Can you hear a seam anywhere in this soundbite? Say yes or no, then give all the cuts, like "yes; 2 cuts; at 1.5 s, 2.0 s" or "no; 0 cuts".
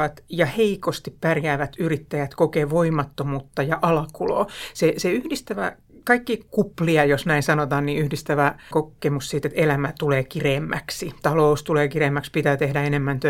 yes; 1 cut; at 8.7 s